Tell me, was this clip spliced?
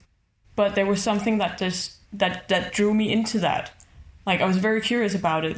yes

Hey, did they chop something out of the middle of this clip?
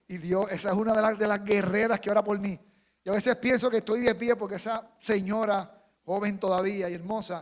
no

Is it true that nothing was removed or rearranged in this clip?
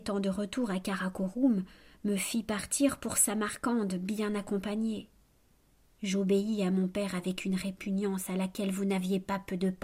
yes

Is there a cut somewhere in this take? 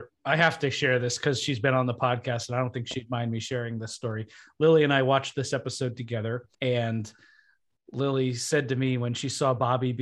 yes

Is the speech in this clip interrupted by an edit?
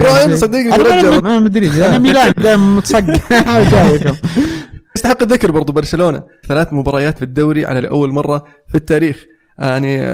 yes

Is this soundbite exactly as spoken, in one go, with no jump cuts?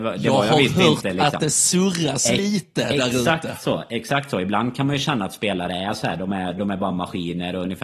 yes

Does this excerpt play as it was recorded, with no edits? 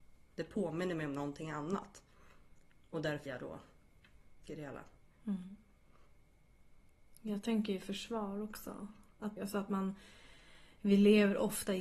no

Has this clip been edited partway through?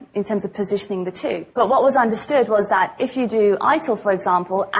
yes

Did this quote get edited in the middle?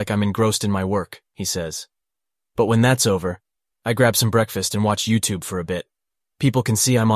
yes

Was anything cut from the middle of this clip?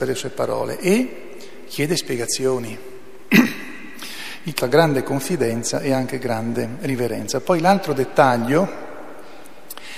yes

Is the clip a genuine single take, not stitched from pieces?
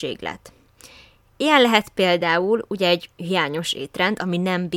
yes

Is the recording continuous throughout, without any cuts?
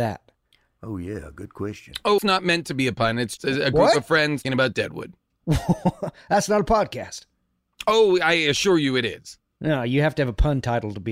no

